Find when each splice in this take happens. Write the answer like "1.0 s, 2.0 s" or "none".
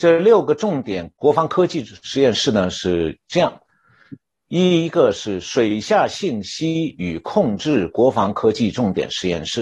1.2 s, 4.2 s